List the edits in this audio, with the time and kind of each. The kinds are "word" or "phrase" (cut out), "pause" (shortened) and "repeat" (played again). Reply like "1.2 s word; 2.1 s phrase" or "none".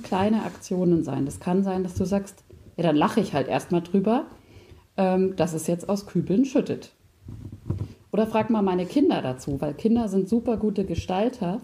none